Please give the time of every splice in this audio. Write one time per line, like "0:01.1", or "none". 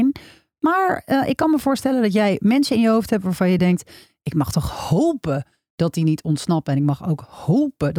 none